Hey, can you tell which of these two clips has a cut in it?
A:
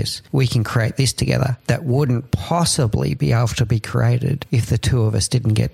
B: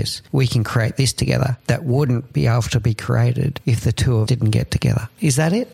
B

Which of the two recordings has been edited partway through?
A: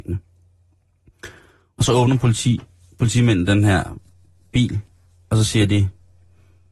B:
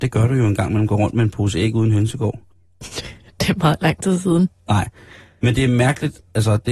B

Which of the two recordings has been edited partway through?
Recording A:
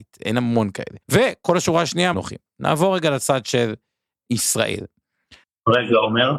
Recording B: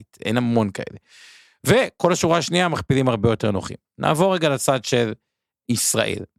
A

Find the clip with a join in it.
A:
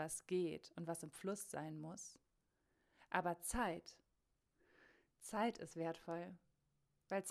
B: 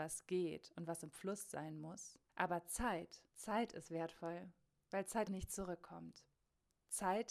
B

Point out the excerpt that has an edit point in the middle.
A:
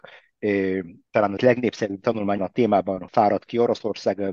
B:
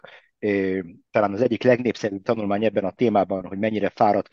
A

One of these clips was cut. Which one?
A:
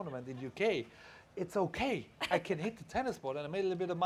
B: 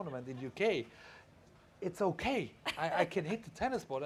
A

